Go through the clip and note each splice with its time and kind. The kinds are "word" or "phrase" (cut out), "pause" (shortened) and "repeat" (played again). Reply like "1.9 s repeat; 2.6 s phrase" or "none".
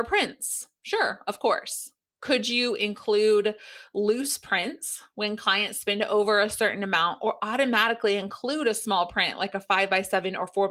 none